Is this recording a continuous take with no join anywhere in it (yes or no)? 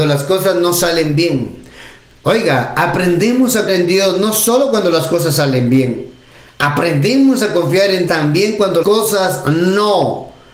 no